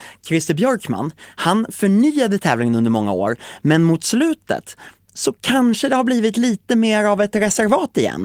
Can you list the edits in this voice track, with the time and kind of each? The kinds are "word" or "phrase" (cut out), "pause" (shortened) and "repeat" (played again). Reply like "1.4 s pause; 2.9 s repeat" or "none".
none